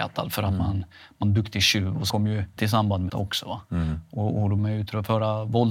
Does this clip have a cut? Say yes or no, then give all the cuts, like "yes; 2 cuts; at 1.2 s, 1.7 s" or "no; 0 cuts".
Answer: yes; 5 cuts; at 1.2 s, 2.1 s, 2.6 s, 3.1 s, 4.6 s